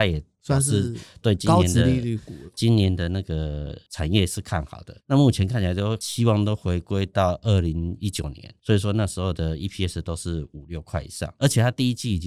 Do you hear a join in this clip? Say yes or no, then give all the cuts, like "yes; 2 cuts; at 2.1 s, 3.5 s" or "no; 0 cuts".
yes; 1 cut; at 5.0 s